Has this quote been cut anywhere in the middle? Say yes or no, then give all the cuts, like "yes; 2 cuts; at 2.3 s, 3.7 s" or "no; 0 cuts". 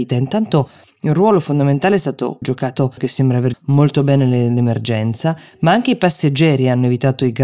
yes; 3 cuts; at 2.4 s, 3.0 s, 3.5 s